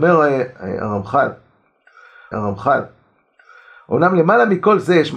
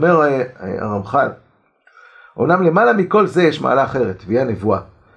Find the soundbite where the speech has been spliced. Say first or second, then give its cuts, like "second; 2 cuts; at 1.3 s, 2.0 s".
first; 1 cut; at 2.3 s